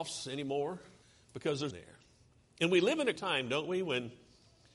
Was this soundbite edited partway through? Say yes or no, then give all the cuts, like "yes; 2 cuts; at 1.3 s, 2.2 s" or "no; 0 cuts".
yes; 3 cuts; at 1.0 s, 1.7 s, 3.2 s